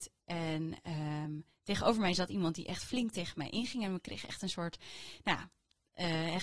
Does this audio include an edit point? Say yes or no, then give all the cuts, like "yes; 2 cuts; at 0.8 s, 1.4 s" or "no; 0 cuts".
no; 0 cuts